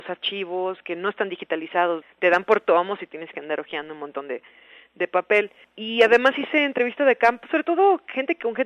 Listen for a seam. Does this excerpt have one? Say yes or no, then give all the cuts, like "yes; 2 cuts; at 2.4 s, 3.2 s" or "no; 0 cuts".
no; 0 cuts